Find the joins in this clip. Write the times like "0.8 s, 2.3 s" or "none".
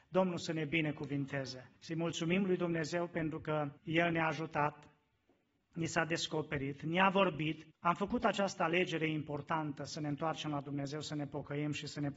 1.8 s, 3.8 s, 7.7 s